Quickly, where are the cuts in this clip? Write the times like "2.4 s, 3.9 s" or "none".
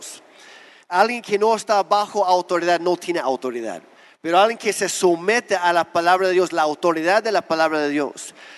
3.9 s